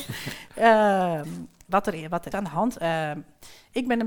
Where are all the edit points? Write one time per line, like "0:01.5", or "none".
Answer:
0:02.3

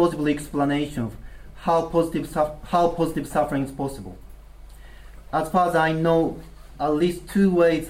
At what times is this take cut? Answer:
none

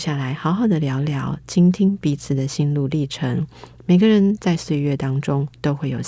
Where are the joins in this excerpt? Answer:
none

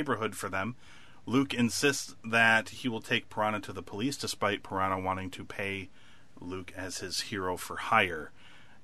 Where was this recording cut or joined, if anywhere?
none

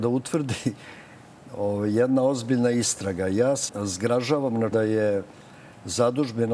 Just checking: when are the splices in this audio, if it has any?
0:03.7
0:04.7

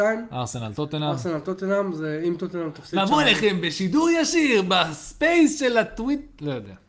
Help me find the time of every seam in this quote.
none

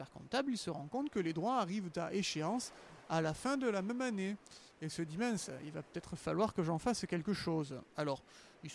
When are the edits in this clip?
none

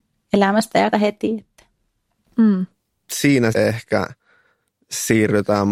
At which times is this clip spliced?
0:00.9
0:03.5

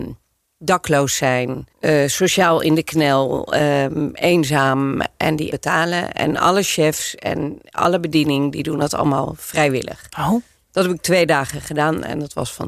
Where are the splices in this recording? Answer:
0:01.7
0:05.5

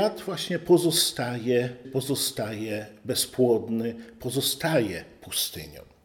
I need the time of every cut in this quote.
0:01.8

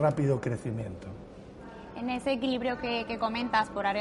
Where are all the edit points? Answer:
none

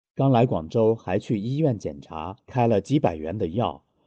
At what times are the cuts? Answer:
0:02.4

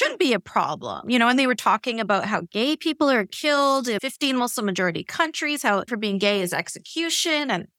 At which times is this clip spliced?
0:04.0
0:05.9

